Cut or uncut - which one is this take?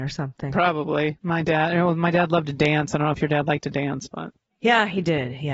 uncut